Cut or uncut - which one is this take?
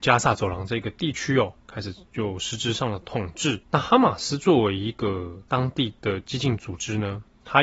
cut